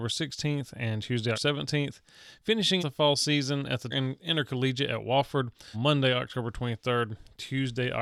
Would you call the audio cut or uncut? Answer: cut